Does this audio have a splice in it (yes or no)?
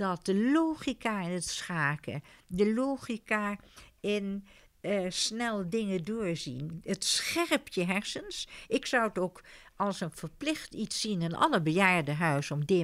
no